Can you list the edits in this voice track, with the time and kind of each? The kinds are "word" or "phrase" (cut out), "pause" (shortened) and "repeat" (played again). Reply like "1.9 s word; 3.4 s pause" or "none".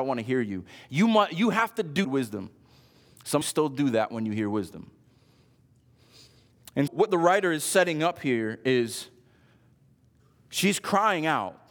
2.0 s phrase; 3.4 s phrase; 6.9 s word